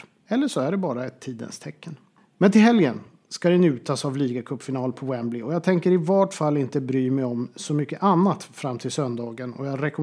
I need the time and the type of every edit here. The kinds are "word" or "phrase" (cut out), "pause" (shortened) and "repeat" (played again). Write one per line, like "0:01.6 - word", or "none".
none